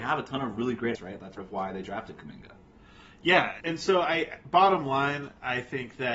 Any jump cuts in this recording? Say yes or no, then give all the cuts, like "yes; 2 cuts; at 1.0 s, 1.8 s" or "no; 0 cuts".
yes; 3 cuts; at 0.9 s, 1.4 s, 3.6 s